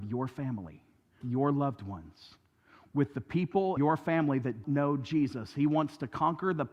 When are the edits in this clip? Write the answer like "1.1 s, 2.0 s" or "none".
1.2 s, 3.8 s, 4.6 s